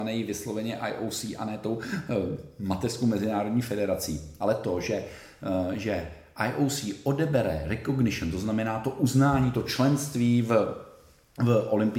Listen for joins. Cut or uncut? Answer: uncut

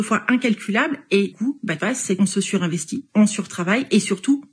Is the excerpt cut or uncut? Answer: cut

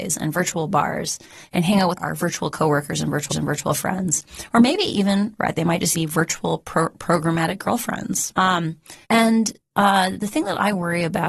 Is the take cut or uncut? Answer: cut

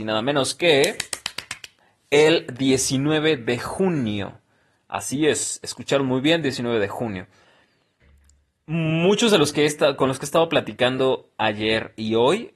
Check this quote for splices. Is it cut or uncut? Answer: uncut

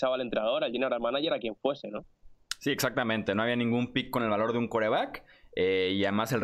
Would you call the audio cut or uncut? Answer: uncut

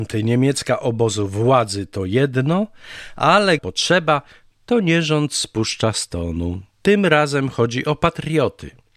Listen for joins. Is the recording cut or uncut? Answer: cut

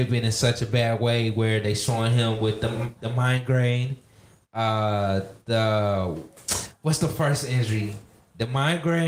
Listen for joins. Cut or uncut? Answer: uncut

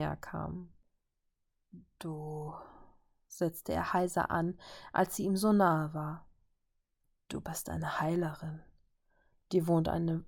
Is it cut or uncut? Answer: uncut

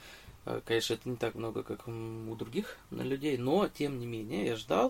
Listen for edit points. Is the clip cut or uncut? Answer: cut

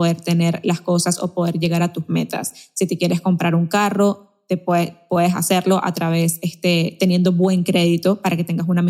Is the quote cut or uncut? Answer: uncut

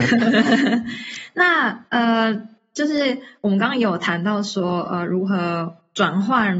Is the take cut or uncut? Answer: uncut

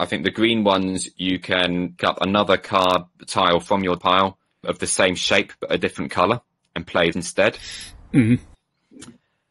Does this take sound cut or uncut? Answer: cut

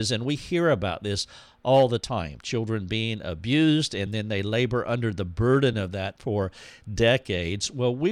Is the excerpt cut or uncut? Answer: uncut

